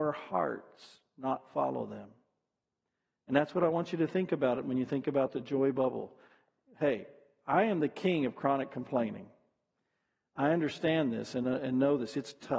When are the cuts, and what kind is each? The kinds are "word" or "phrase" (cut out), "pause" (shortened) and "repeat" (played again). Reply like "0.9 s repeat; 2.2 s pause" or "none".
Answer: none